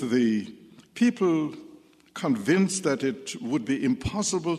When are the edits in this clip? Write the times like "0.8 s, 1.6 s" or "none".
none